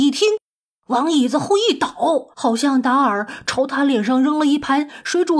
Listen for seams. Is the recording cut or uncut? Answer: cut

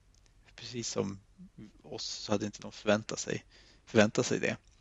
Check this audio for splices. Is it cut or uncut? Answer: uncut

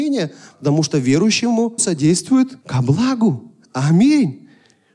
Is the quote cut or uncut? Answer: cut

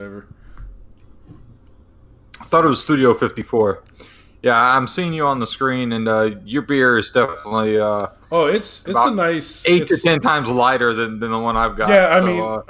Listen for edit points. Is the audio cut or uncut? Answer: uncut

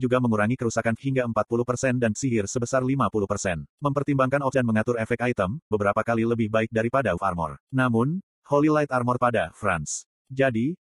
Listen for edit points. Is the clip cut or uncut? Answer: cut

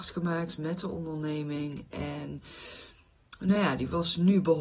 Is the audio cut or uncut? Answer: uncut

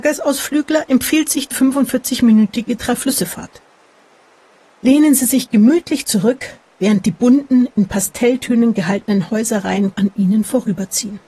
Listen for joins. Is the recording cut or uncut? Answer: cut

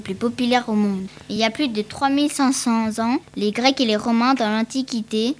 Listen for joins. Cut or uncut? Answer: uncut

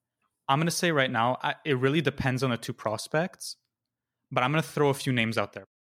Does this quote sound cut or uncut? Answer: uncut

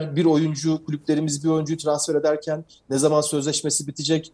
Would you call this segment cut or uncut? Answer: uncut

